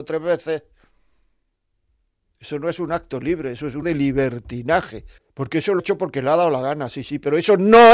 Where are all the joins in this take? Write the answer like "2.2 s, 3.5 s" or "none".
3.8 s, 5.2 s, 5.8 s